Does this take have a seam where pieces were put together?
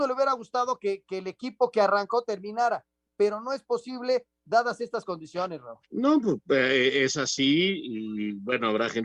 yes; 1 cut; at 5.8 s

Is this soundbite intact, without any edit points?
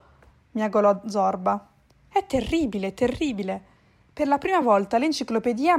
yes; 0 cuts

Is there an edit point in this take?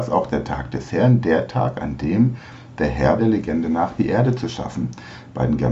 yes; 1 cut; at 3.2 s

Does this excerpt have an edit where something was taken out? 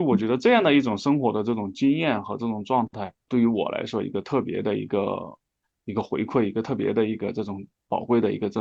yes; 1 cut; at 3.3 s

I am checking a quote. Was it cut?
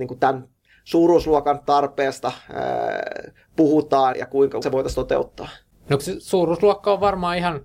yes; 3 cuts; at 4.1 s, 4.6 s, 6.0 s

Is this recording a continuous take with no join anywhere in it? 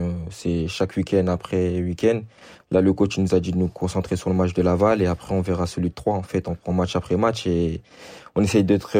yes; 0 cuts

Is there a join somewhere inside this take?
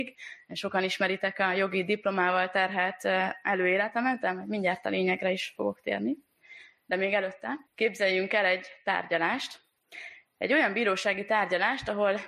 yes; 1 cut; at 7.7 s

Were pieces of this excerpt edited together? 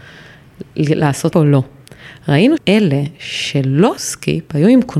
yes; 3 cuts; at 1.3 s, 2.6 s, 4.0 s

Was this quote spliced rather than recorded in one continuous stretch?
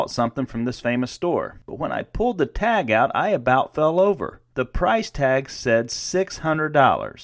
no; 0 cuts

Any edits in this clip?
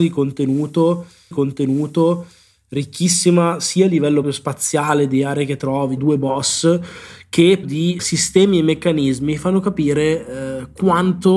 yes; 5 cuts; at 1.3 s, 4.2 s, 6.0 s, 7.6 s, 8.0 s

